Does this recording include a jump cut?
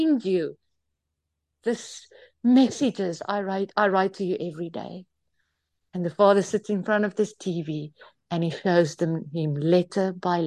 no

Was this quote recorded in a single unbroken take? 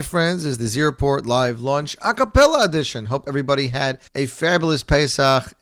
no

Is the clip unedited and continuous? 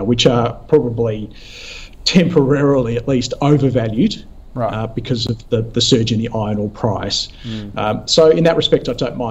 yes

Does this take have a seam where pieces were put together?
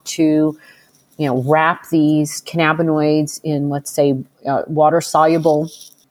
no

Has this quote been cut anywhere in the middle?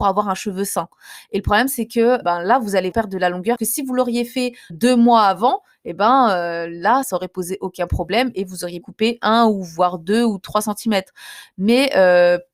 yes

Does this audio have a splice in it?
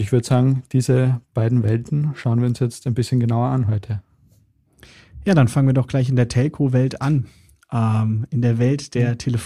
no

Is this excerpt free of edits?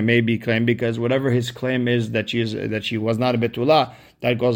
yes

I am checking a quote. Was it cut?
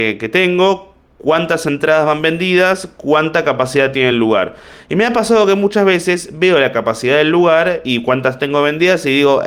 no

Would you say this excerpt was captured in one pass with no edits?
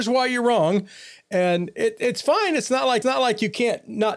no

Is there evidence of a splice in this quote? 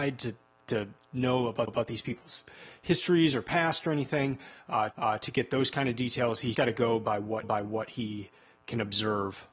yes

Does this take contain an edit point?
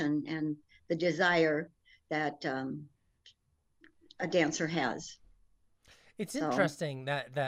no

